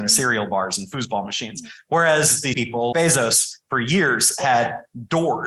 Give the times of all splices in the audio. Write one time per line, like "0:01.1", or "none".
0:02.5
0:02.9